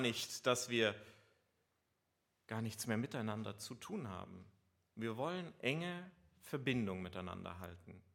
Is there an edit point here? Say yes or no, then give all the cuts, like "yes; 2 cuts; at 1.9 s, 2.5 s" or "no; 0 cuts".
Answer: no; 0 cuts